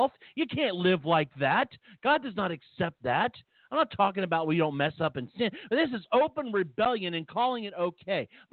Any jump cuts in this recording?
no; 0 cuts

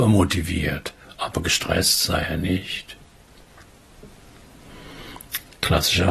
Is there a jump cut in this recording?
no; 0 cuts

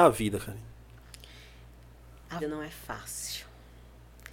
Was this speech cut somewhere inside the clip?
yes; 1 cut; at 2.4 s

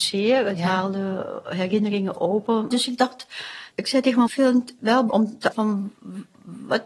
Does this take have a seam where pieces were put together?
yes; 4 cuts; at 3.7 s, 4.3 s, 5.1 s, 5.5 s

